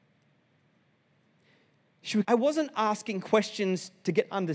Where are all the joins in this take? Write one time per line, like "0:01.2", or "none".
0:02.2